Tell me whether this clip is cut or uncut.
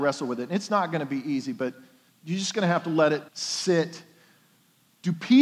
cut